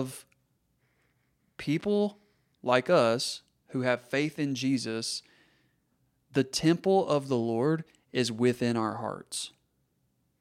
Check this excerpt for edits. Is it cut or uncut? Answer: uncut